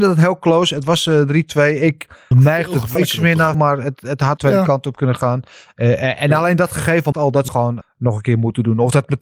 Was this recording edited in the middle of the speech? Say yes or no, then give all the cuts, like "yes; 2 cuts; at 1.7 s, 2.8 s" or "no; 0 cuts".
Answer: yes; 7 cuts; at 2.3 s, 3.0 s, 3.5 s, 4.4 s, 7.1 s, 7.5 s, 7.8 s